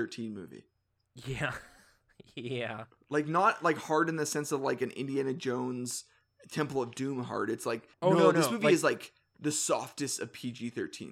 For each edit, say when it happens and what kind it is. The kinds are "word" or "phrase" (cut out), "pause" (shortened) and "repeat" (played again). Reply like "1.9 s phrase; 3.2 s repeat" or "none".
7.9 s pause

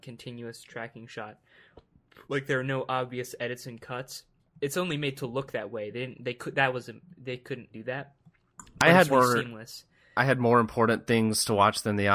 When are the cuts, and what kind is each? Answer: 2.2 s pause; 4.4 s pause; 7.7 s word; 9.1 s word

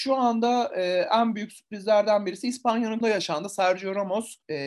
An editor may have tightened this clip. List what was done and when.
3.0 s word

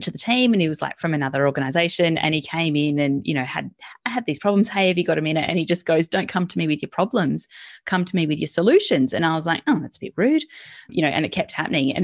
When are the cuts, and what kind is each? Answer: none

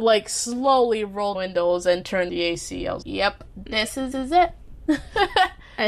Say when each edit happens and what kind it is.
1.3 s phrase; 2.3 s word; 3.0 s word; 4.1 s repeat

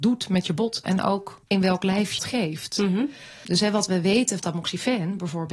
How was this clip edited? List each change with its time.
2.2 s word; 4.4 s word

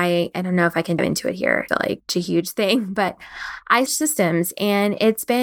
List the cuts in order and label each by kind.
1.0 s word; 1.7 s word; 2.1 s word; 3.9 s word

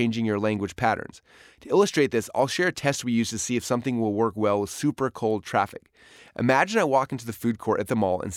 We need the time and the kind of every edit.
none

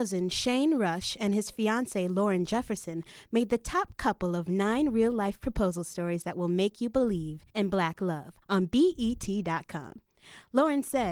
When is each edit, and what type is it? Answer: 7.5 s pause; 8.4 s pause

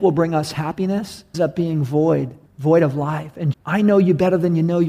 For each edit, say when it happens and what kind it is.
1.3 s word; 2.5 s pause; 3.5 s phrase

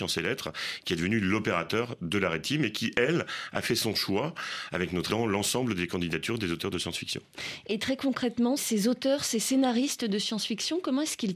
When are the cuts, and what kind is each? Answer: 5.1 s word; 8.6 s word

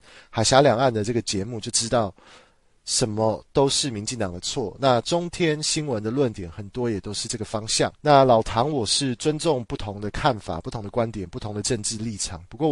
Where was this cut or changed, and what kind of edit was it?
7.9 s pause

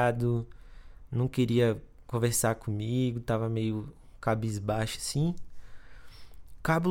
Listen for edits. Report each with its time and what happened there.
none

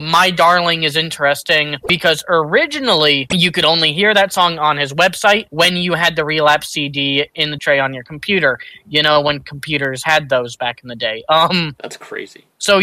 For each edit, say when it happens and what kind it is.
7.6 s word

